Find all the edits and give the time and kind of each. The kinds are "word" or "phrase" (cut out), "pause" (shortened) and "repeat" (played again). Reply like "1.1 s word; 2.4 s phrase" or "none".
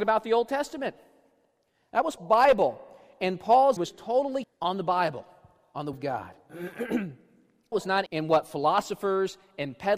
2.2 s word; 3.8 s word; 4.4 s word; 5.9 s word; 7.7 s word; 8.1 s word